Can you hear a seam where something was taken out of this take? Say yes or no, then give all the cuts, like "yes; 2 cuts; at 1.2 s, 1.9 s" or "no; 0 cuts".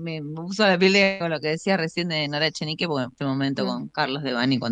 yes; 2 cuts; at 1.2 s, 3.2 s